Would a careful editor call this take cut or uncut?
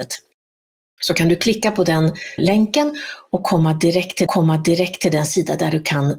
cut